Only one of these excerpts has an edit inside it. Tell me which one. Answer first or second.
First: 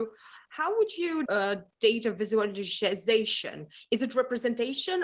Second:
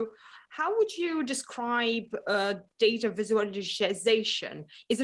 first